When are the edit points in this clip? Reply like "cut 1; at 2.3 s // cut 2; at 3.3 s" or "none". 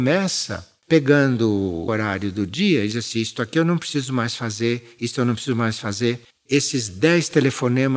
cut 1; at 1.9 s // cut 2; at 6.3 s